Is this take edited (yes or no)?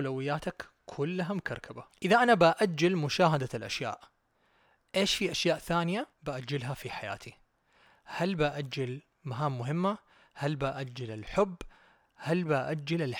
yes